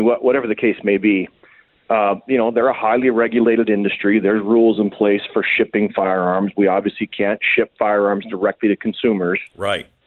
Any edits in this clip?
no; 0 cuts

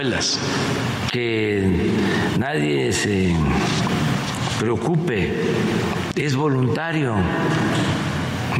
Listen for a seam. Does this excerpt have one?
no; 0 cuts

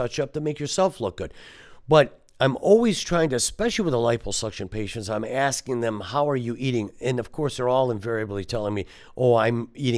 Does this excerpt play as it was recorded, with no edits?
yes; 0 cuts

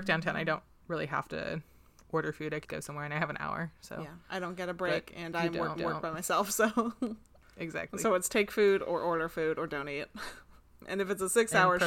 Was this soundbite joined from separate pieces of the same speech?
yes; 4 cuts; at 2.6 s, 4.2 s, 5.8 s, 10.6 s

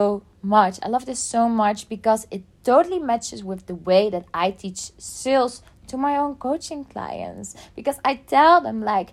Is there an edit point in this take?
no; 0 cuts

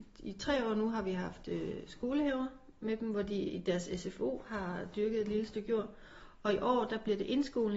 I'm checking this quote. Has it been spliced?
no; 0 cuts

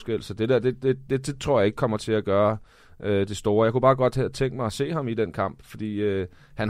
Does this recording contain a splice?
no; 0 cuts

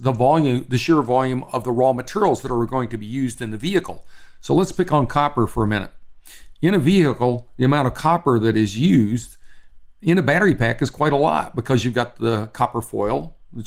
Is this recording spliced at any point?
no; 0 cuts

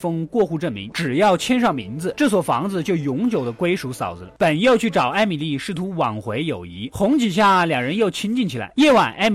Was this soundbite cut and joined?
no; 0 cuts

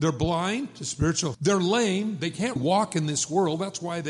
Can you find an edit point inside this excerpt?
yes; 2 cuts; at 1.3 s, 2.6 s

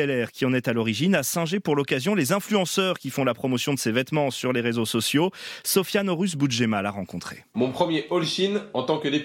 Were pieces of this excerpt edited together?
no; 0 cuts

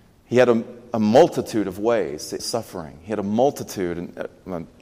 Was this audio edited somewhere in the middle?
yes; 1 cut; at 2.4 s

